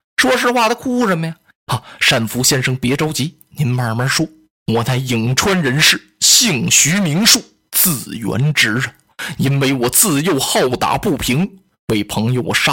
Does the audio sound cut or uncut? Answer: uncut